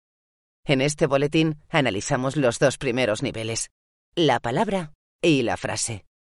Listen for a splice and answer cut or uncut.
uncut